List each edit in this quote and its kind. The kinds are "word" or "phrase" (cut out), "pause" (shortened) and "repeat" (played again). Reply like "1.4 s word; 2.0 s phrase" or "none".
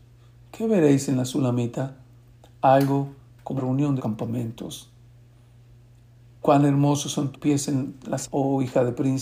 3.6 s word; 4.0 s word; 7.3 s word; 8.2 s word